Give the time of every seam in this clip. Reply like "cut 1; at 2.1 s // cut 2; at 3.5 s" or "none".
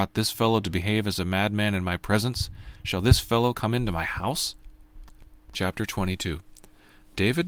none